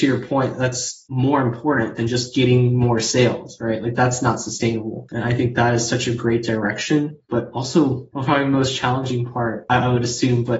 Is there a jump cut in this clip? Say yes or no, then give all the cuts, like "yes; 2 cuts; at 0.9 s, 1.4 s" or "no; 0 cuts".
no; 0 cuts